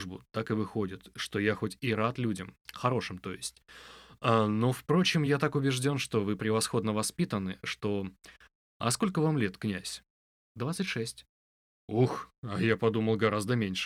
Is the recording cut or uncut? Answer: uncut